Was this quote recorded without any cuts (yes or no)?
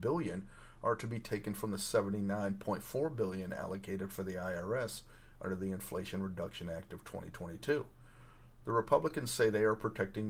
yes